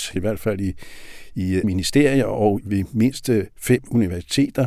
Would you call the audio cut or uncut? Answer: cut